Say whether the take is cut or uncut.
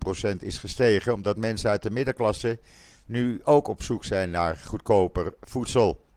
uncut